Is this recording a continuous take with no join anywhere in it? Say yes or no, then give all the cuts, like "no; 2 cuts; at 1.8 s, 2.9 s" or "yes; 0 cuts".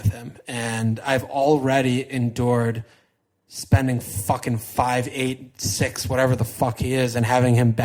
yes; 0 cuts